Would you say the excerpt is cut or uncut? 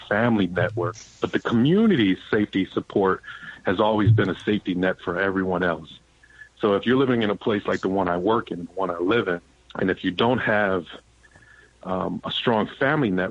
cut